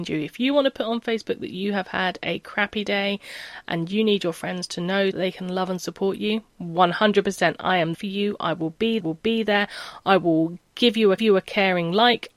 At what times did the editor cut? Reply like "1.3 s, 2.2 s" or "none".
5.1 s, 7.9 s, 9.0 s, 11.2 s